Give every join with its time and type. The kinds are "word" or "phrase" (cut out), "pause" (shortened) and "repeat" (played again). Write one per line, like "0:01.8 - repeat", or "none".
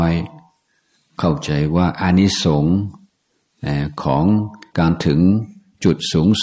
0:04.7 - pause

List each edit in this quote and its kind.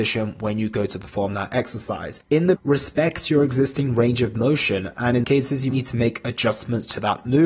0:02.5 - word
0:05.2 - word
0:05.7 - word

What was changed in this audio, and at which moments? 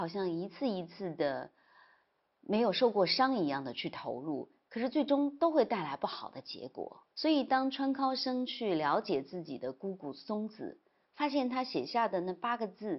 0:07.1 - pause

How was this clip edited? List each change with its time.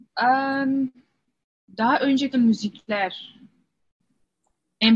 0:02.3 - word

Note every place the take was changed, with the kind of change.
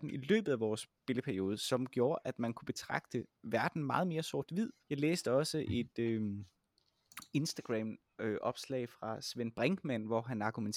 0:01.0 - pause
0:03.3 - pause
0:04.8 - pause

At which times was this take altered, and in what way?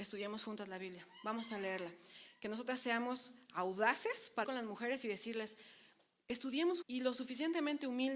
0:04.4 - word
0:06.8 - word

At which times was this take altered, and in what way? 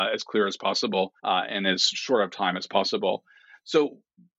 0:01.2 - pause

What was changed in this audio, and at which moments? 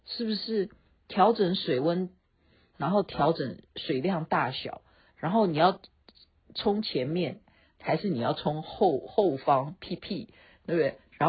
none

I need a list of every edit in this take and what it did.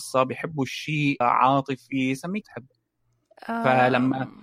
0:01.2 - phrase
0:02.4 - word

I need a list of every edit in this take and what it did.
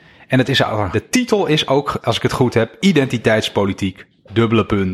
0:00.9 - word
0:02.0 - phrase

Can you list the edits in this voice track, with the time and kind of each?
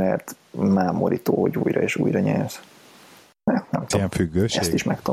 none

